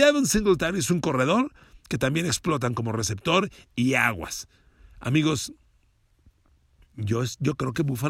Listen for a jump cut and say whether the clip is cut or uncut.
uncut